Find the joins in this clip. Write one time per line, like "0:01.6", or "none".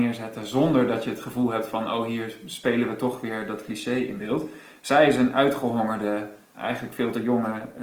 0:06.5